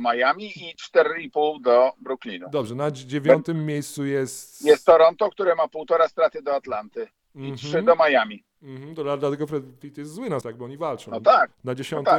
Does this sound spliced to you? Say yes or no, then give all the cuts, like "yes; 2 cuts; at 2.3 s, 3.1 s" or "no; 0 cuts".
yes; 2 cuts; at 9.8 s, 10.4 s